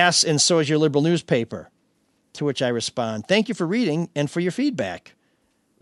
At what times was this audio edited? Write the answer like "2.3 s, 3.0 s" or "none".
none